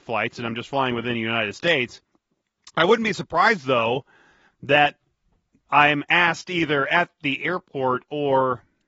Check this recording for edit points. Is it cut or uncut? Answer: uncut